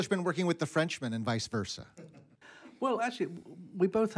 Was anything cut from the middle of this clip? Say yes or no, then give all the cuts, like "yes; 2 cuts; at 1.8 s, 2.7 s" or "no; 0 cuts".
no; 0 cuts